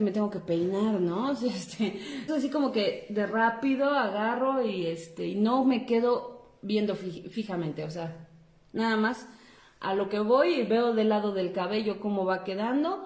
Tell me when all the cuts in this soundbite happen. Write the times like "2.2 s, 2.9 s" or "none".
2.3 s